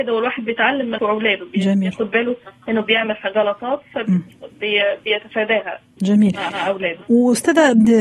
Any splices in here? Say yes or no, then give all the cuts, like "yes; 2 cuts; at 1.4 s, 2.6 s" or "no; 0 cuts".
yes; 2 cuts; at 1.0 s, 6.5 s